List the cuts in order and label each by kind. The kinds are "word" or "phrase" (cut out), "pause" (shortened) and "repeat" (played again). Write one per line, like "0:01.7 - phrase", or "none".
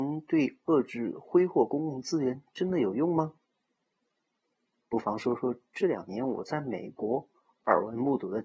none